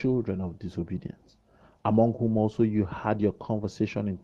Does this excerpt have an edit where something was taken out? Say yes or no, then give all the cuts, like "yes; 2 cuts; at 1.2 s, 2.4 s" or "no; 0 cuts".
no; 0 cuts